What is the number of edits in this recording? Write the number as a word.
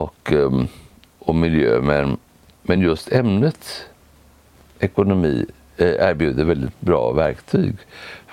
zero